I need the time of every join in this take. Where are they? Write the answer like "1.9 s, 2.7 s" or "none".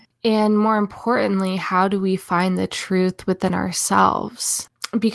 none